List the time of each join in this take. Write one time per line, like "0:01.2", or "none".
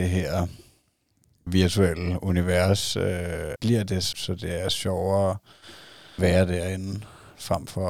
0:01.5
0:03.6
0:04.1
0:06.2